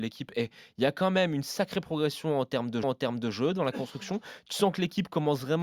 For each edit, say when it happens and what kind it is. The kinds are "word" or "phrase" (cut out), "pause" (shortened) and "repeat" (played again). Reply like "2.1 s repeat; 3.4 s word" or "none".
2.8 s repeat